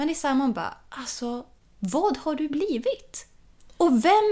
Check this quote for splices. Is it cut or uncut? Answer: uncut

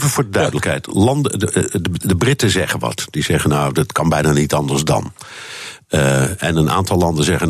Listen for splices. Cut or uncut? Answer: uncut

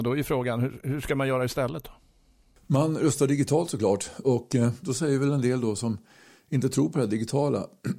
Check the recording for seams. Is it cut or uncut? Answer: uncut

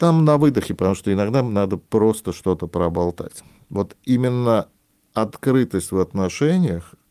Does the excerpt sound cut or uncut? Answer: uncut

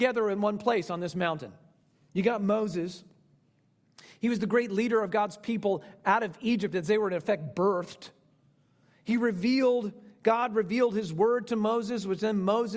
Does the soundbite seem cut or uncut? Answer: uncut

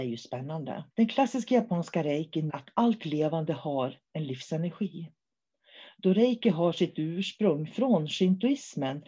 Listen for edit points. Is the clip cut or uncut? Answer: cut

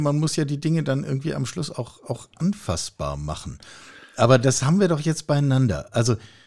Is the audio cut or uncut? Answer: uncut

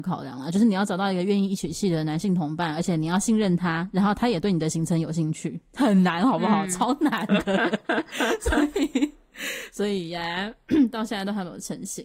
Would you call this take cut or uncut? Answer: uncut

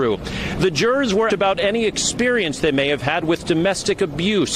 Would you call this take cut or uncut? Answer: cut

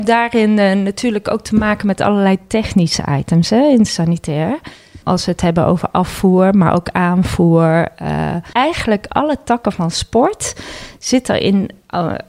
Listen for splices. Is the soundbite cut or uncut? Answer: uncut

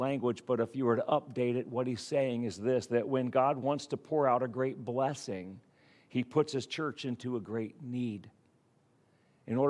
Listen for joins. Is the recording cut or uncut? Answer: uncut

